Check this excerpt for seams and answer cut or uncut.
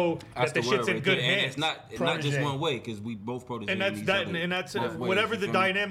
uncut